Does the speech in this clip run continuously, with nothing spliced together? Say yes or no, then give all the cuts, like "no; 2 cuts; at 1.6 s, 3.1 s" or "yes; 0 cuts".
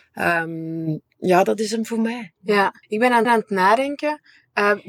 no; 2 cuts; at 2.8 s, 3.2 s